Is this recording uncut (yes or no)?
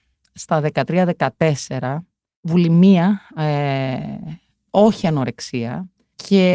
yes